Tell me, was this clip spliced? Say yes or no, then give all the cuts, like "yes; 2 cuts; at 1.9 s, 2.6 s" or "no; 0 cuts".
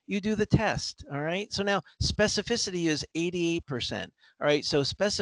no; 0 cuts